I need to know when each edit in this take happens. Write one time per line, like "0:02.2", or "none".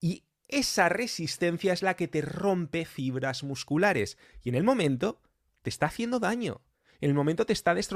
none